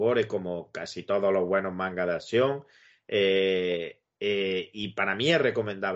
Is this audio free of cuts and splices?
yes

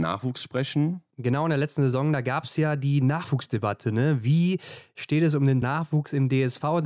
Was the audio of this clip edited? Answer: yes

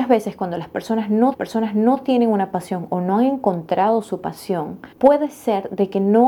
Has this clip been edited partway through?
yes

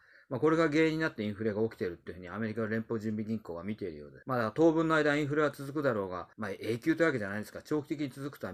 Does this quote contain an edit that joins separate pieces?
yes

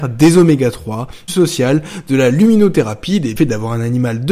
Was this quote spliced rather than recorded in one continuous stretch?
yes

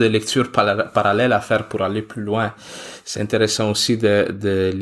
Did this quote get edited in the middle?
no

